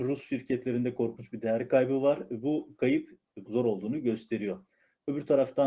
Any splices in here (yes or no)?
yes